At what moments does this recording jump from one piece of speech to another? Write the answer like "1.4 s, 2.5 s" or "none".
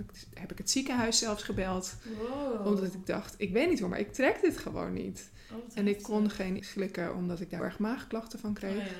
6.6 s, 7.6 s